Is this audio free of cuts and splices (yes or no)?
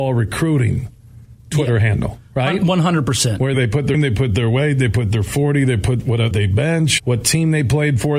no